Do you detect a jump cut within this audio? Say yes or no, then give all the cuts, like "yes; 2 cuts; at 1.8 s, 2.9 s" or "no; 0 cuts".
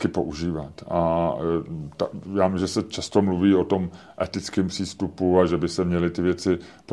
no; 0 cuts